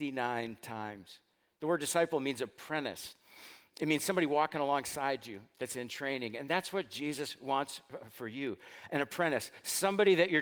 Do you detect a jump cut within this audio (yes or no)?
no